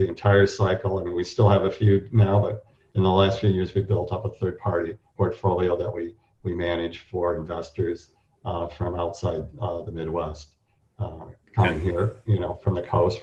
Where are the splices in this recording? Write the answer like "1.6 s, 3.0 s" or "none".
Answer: none